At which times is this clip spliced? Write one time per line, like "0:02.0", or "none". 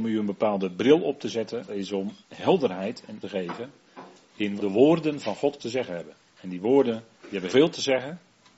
0:01.7
0:02.2
0:03.2
0:04.6
0:05.6
0:07.1
0:07.5

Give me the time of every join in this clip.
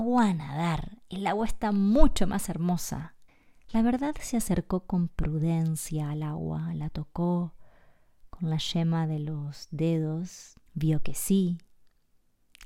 0:03.3
0:10.7

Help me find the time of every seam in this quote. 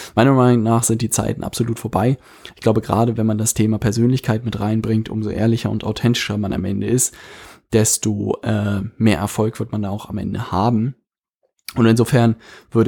none

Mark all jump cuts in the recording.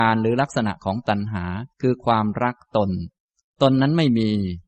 0:01.7

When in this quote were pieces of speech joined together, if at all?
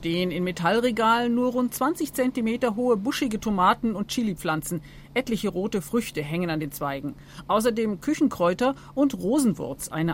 none

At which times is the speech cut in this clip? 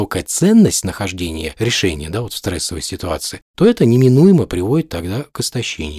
none

